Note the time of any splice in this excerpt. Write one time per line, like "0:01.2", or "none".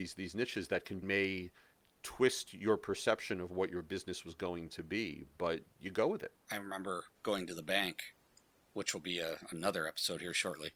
0:01.0
0:06.4
0:07.1